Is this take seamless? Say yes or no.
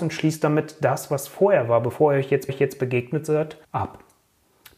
no